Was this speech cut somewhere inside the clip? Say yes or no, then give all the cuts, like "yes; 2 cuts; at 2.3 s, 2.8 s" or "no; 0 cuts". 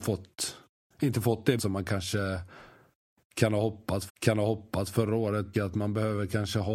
yes; 3 cuts; at 1.6 s, 4.1 s, 5.5 s